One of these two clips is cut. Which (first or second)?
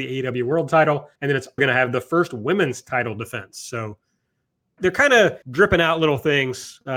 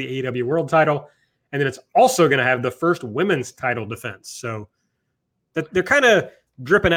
first